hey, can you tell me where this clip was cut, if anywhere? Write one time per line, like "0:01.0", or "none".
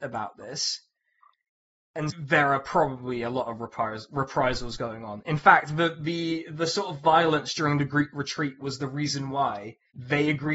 0:02.1